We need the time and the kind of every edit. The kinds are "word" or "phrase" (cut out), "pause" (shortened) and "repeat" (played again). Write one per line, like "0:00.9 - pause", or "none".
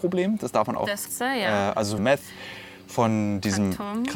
0:01.1 - word
0:02.0 - phrase